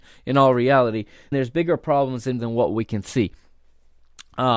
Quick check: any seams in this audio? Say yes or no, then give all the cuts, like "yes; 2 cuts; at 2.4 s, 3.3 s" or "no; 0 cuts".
yes; 2 cuts; at 1.3 s, 2.4 s